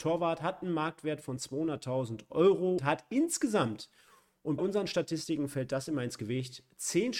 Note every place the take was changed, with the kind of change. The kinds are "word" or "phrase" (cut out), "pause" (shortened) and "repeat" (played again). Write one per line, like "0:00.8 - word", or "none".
0:02.8 - word
0:04.6 - word